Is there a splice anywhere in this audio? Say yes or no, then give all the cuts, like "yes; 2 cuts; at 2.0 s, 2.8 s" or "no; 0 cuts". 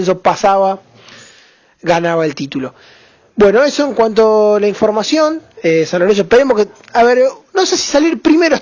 no; 0 cuts